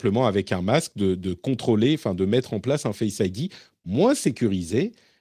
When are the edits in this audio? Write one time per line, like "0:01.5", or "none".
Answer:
none